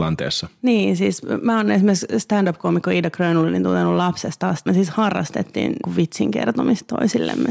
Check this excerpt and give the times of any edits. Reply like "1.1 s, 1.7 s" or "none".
4.7 s, 5.8 s